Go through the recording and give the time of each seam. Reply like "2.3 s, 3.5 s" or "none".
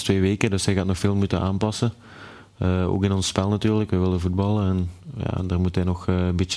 none